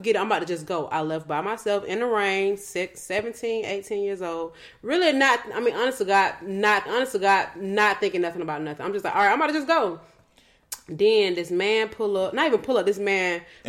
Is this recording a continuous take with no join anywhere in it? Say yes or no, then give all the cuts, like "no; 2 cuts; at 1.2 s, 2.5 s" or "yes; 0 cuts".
no; 1 cut; at 6.9 s